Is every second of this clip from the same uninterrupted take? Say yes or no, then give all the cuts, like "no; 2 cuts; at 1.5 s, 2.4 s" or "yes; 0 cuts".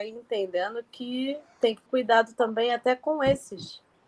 no; 1 cut; at 1.9 s